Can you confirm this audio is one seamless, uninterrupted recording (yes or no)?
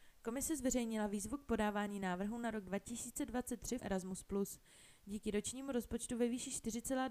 no